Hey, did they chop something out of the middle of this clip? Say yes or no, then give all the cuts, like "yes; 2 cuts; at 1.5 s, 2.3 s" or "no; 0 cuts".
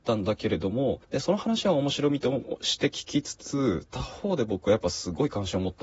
yes; 1 cut; at 1.0 s